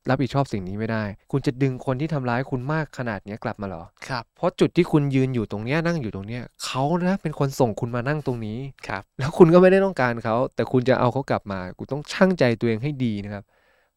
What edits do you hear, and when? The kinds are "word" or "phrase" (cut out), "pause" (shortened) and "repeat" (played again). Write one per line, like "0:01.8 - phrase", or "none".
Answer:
0:01.2 - pause
0:04.0 - pause
0:08.8 - pause
0:09.1 - pause